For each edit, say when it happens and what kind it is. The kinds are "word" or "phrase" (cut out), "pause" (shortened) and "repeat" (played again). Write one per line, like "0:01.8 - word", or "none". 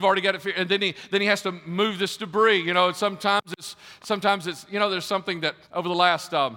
0:05.6 - pause